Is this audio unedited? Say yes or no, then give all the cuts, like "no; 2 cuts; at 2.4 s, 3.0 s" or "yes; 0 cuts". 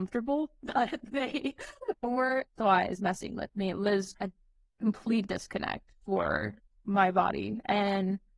no; 3 cuts; at 2.5 s, 3.0 s, 4.1 s